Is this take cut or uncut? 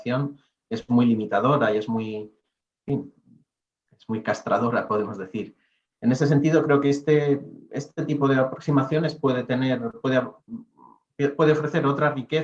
uncut